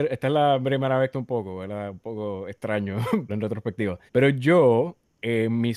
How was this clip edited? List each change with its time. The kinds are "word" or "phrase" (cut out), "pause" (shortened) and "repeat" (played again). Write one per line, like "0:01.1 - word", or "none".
0:01.1 - phrase
0:03.3 - word
0:04.1 - pause

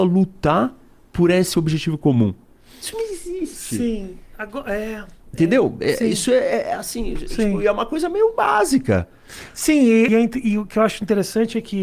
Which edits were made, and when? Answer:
0:10.1 - word

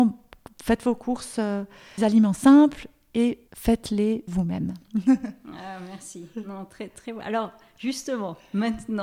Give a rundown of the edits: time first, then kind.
0:02.0 - phrase
0:03.5 - pause
0:04.3 - word

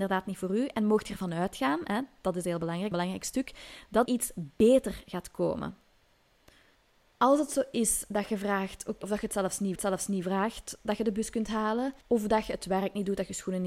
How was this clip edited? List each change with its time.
0:02.9 - phrase
0:04.1 - word
0:06.7 - pause
0:09.0 - word
0:09.8 - repeat
0:12.0 - pause

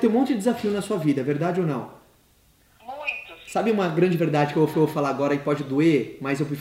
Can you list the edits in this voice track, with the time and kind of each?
0:04.7 - repeat

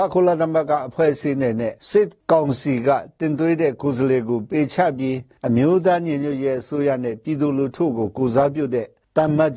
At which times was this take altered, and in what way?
0:01.8 - pause

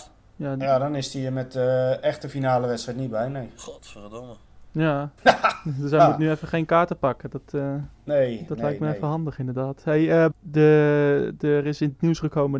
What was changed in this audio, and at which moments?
0:05.2 - pause
0:07.9 - pause
0:10.3 - word

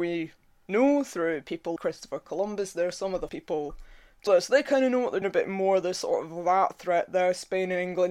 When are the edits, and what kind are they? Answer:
0:01.8 - word
0:03.3 - word
0:04.3 - word
0:05.2 - word

